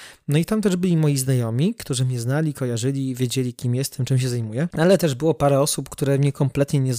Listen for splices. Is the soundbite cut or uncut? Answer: uncut